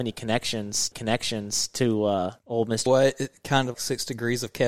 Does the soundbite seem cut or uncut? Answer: cut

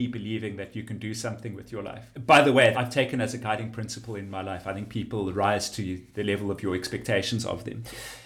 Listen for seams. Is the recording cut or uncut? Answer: cut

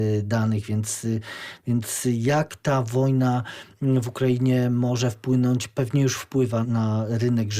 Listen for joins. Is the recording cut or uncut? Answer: cut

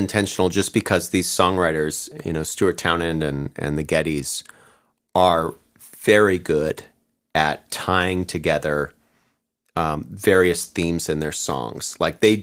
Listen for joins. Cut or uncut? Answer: uncut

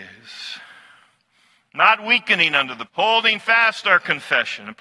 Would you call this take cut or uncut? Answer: cut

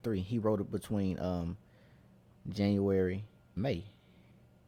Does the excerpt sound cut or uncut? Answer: cut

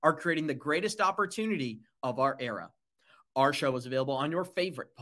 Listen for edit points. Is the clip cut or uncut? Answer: uncut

